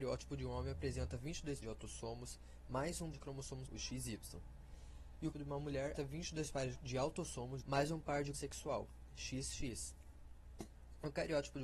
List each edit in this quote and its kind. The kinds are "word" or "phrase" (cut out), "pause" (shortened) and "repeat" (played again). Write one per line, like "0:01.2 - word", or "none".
0:01.6 - word
0:03.1 - word
0:03.7 - word
0:05.3 - word
0:06.0 - word
0:06.8 - word
0:07.6 - word
0:08.3 - word

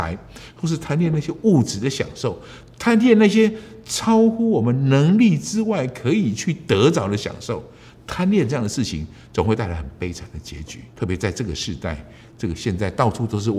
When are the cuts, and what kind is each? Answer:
0:10.9 - pause

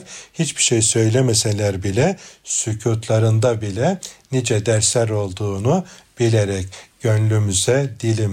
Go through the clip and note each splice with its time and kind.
none

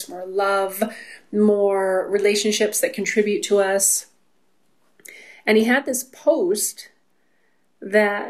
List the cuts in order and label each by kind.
none

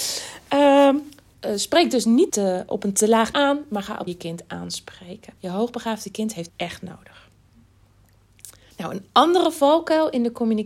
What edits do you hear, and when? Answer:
0:01.3 - word
0:02.3 - word
0:03.3 - word
0:04.1 - phrase
0:05.4 - pause
0:06.5 - word
0:08.7 - pause

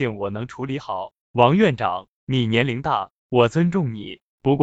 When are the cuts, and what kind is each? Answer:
0:01.2 - pause

